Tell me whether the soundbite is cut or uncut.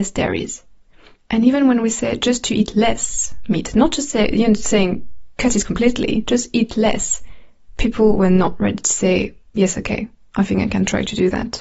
uncut